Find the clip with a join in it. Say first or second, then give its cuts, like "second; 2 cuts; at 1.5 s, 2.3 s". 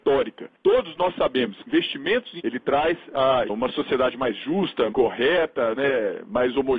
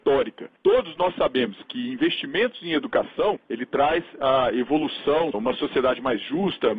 first; 4 cuts; at 1.7 s, 2.4 s, 3.5 s, 4.9 s